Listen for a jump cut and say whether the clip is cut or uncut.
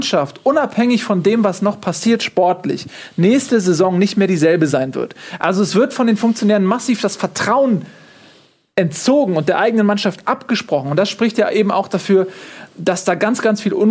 uncut